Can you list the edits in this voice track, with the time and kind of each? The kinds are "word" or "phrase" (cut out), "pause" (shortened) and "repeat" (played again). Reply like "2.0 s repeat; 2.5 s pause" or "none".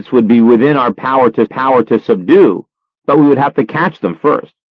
1.5 s repeat